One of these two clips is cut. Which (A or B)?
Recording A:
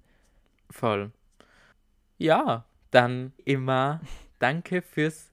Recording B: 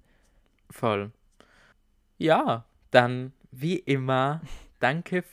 A